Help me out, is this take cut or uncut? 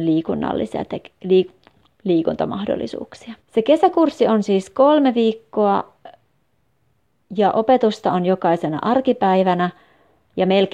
cut